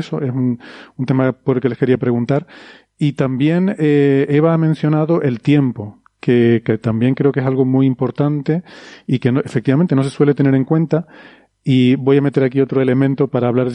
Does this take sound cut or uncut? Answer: uncut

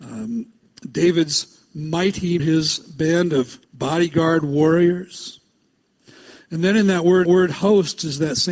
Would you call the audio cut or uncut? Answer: cut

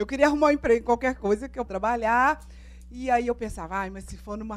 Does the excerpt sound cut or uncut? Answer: cut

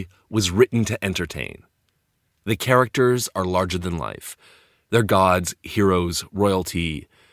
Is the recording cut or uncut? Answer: uncut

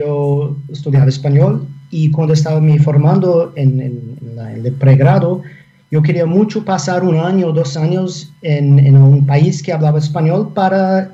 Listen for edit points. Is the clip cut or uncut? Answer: uncut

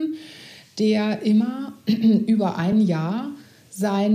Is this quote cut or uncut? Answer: uncut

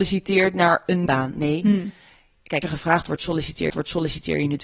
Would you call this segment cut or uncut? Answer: cut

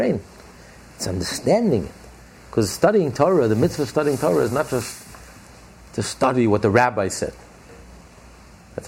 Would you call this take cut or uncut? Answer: uncut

